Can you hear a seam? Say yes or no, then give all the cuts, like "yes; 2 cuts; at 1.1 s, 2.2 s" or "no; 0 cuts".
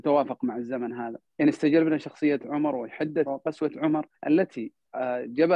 yes; 3 cuts; at 1.3 s, 3.2 s, 4.2 s